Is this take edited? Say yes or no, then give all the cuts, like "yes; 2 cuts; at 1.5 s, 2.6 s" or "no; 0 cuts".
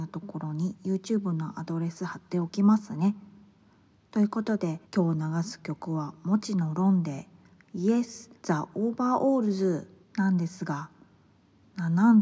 yes; 3 cuts; at 4.8 s, 8.4 s, 10.0 s